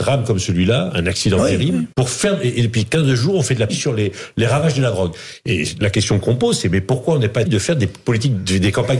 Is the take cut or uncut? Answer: cut